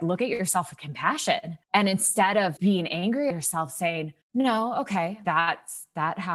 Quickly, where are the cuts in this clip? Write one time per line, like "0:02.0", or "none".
0:01.6
0:02.6
0:03.3
0:04.2
0:05.2